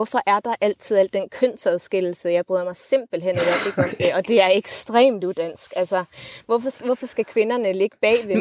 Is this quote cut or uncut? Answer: uncut